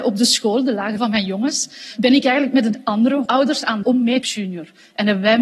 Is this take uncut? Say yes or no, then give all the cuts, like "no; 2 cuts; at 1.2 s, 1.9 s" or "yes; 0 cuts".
no; 4 cuts; at 1.0 s, 3.3 s, 3.8 s, 4.2 s